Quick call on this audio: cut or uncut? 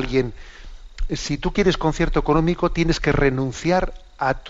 uncut